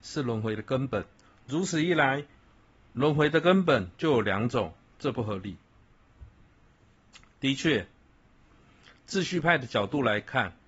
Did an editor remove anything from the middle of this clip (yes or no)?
no